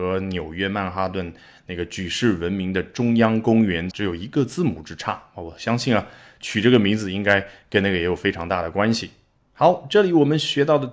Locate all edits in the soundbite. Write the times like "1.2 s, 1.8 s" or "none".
3.9 s